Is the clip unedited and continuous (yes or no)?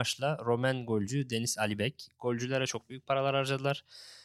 yes